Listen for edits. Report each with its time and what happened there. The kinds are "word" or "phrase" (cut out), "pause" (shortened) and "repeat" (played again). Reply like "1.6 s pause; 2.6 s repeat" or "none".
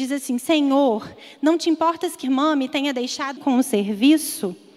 2.2 s word; 3.4 s word